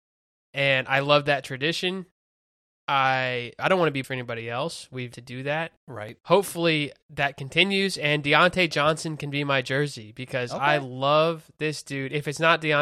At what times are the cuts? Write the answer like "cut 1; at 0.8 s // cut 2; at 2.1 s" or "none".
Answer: cut 1; at 3.6 s // cut 2; at 4.0 s // cut 3; at 5.1 s // cut 4; at 5.8 s